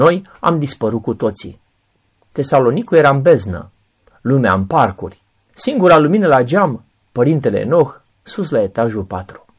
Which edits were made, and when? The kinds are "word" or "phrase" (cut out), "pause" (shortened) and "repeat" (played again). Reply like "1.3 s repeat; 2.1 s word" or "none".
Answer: none